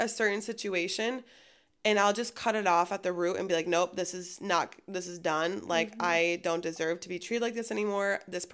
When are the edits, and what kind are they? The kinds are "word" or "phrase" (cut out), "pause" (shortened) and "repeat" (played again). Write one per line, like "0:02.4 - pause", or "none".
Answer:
none